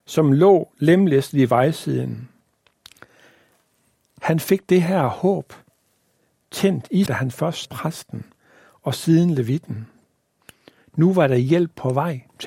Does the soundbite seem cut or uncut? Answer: cut